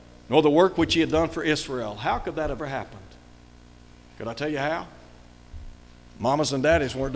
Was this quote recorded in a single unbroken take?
no; 1 cut; at 2.6 s

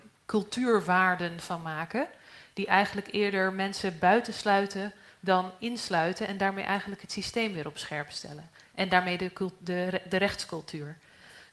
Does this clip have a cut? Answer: no; 0 cuts

